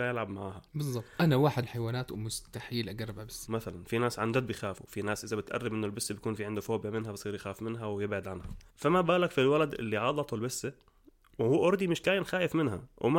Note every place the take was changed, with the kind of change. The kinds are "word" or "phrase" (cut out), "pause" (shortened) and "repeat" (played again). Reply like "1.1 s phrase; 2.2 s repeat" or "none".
1.6 s phrase; 3.5 s word; 8.7 s pause